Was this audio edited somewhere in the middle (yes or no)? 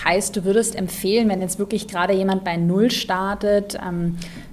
no